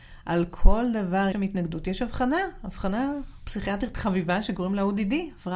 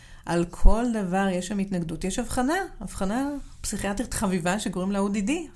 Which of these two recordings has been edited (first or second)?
first